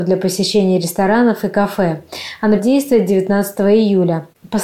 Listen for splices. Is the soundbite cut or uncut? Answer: cut